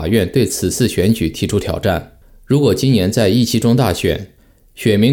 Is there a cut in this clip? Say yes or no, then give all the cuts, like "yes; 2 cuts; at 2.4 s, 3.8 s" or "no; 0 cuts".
no; 0 cuts